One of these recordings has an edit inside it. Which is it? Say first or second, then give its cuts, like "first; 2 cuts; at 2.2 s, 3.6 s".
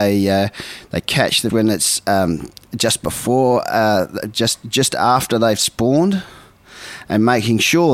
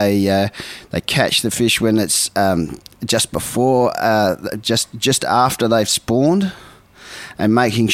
first; 1 cut; at 1.5 s